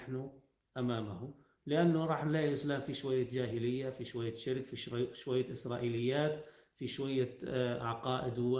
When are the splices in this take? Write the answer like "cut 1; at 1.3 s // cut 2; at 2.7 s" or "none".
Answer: none